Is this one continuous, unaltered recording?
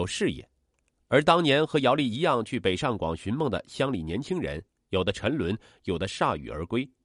yes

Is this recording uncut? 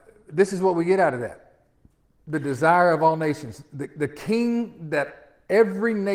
yes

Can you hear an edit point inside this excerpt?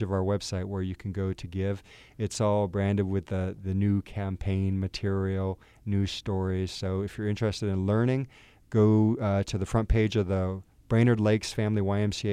no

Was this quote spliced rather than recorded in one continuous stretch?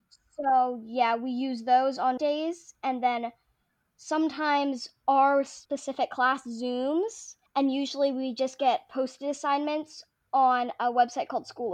yes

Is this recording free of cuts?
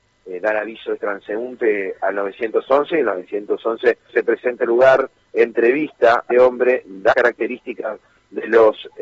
no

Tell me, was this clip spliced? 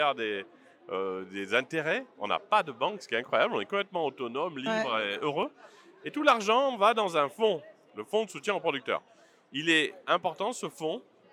no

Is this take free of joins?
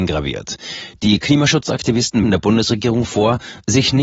no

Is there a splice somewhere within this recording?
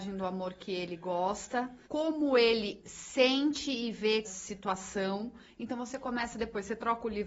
yes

